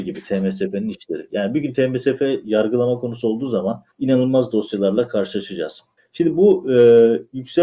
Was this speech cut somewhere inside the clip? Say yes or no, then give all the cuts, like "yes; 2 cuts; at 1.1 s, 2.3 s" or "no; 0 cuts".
yes; 2 cuts; at 3.9 s, 6.0 s